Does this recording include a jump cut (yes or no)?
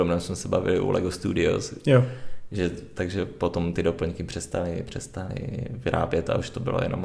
no